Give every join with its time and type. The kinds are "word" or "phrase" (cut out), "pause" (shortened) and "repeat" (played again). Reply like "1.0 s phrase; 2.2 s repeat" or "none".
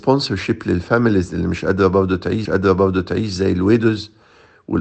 2.5 s repeat

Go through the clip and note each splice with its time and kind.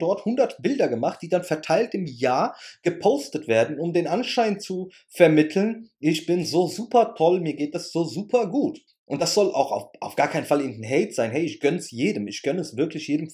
8.9 s pause

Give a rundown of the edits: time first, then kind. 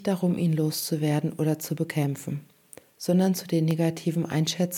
none

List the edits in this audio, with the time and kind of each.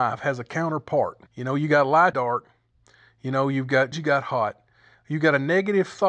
1.3 s pause; 2.1 s phrase; 3.9 s word

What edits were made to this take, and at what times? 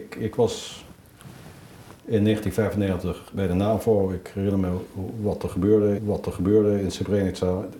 6.0 s repeat

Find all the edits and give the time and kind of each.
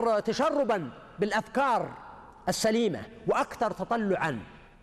none

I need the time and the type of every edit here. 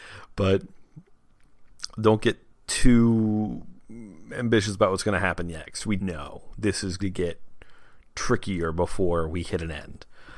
6.0 s word; 7.0 s word

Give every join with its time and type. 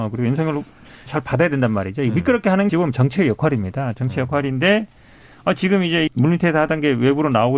1.1 s word; 2.7 s word; 6.1 s word

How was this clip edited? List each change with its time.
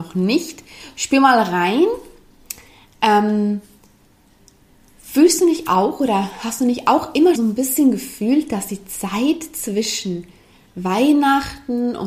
7.4 s word

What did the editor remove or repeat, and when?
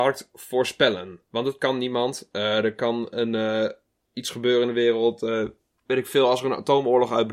none

